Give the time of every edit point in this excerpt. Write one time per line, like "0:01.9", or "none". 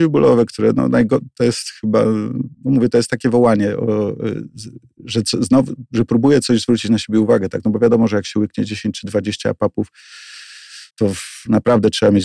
0:02.5
0:10.9